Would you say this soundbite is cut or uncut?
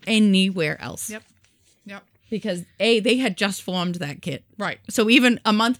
uncut